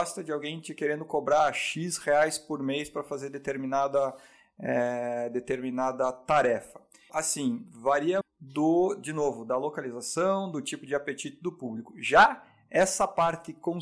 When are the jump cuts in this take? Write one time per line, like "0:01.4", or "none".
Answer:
0:07.1
0:08.2